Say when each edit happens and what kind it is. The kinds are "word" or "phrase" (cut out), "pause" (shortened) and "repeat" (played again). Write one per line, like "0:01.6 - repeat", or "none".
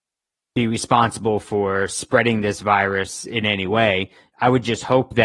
none